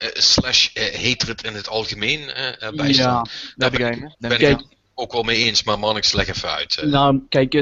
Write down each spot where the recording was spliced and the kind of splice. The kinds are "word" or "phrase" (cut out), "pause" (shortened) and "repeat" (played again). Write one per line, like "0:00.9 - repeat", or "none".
0:04.1 - pause